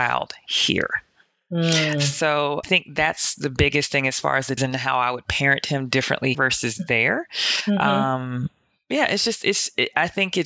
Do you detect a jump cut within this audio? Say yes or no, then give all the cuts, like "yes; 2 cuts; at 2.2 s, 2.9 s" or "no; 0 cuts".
yes; 3 cuts; at 2.6 s, 4.6 s, 6.3 s